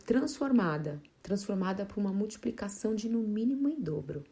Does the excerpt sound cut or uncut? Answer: cut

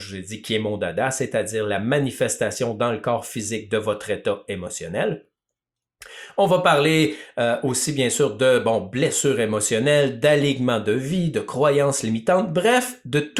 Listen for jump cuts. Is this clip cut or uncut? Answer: uncut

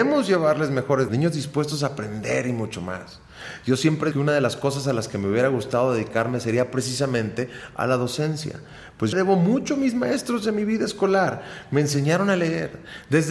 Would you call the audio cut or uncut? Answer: cut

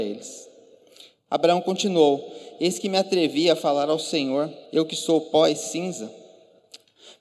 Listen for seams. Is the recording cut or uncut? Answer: cut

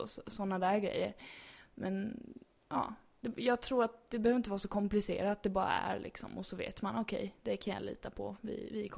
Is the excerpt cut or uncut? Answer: uncut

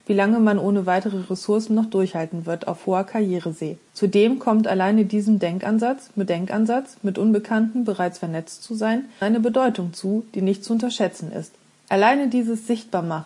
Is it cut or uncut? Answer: cut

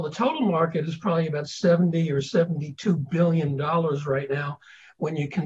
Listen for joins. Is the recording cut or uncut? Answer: uncut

